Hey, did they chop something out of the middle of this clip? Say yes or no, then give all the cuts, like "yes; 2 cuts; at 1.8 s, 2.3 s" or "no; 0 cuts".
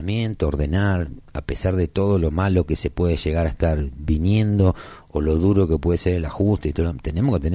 no; 0 cuts